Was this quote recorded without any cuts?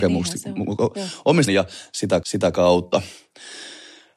no; 2 cuts; at 1.5 s, 2.2 s

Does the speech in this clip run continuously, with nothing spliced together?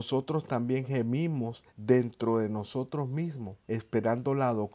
no; 2 cuts; at 1.7 s, 3.6 s

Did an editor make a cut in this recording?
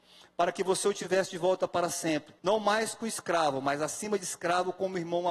yes; 1 cut; at 2.4 s

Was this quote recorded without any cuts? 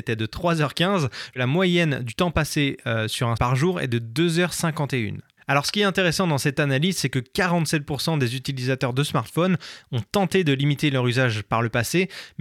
no; 1 cut; at 3.4 s

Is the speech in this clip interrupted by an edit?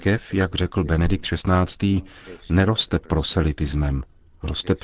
no; 0 cuts

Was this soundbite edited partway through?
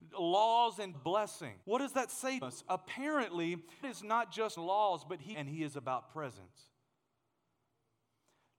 yes; 6 cuts; at 0.9 s, 1.6 s, 2.4 s, 3.8 s, 4.6 s, 5.3 s

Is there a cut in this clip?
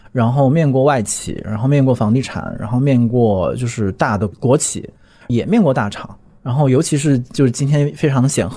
no; 0 cuts

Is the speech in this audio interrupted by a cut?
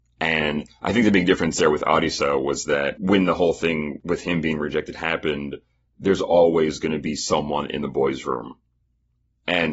no; 0 cuts

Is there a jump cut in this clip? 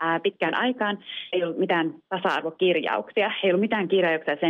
yes; 1 cut; at 1.3 s

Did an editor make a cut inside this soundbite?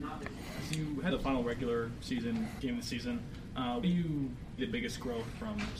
yes; 4 cuts; at 1.1 s, 2.6 s, 3.8 s, 4.6 s

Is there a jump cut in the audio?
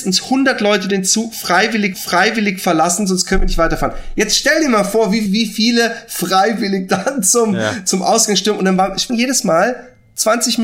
yes; 3 cuts; at 1.9 s, 5.3 s, 9.1 s

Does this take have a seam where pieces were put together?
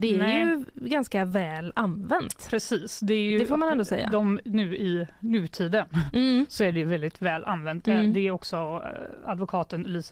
no; 0 cuts

